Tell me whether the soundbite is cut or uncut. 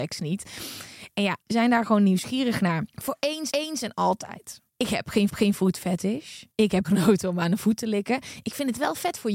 cut